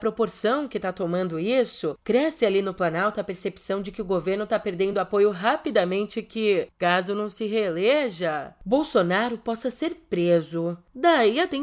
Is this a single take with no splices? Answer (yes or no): yes